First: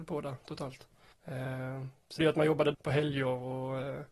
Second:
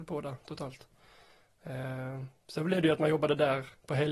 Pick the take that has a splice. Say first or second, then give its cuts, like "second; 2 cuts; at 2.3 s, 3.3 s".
first; 3 cuts; at 1.1 s, 2.2 s, 2.7 s